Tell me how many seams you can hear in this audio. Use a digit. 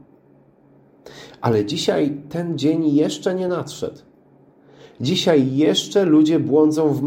0